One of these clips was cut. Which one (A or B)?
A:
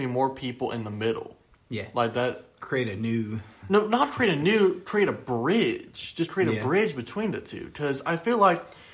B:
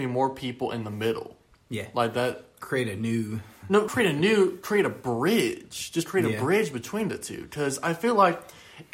B